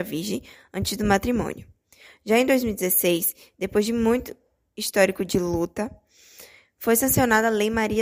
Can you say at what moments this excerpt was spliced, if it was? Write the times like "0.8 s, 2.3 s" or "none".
none

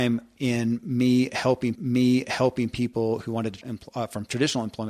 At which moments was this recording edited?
1.8 s, 3.6 s

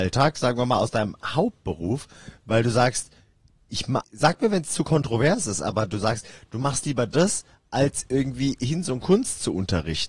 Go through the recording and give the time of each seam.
4.0 s

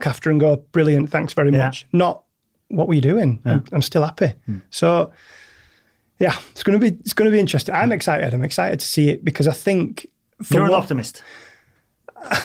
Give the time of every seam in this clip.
none

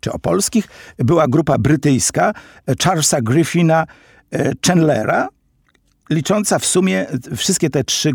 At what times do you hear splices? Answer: none

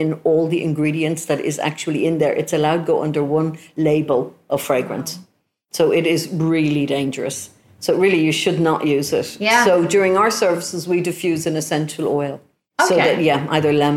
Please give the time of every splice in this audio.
none

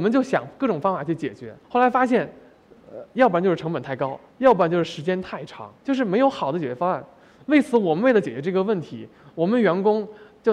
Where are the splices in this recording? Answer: 1.6 s, 4.3 s, 5.8 s

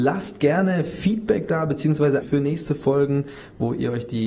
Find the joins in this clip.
2.2 s

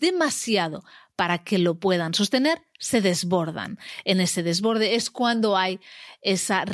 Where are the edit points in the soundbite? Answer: none

